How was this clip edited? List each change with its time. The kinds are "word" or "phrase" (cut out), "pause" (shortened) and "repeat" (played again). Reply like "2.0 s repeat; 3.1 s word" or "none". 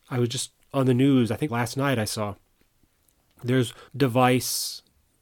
1.5 s phrase; 3.9 s word